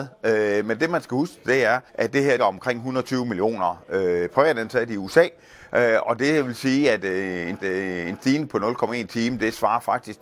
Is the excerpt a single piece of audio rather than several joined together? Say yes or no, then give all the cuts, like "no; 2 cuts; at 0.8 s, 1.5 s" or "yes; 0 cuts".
no; 3 cuts; at 1.9 s, 2.4 s, 7.6 s